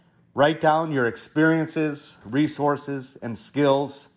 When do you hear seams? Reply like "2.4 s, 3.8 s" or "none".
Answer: 2.2 s